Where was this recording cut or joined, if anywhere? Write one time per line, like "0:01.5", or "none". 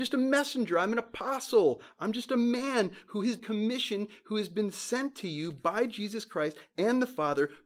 0:03.4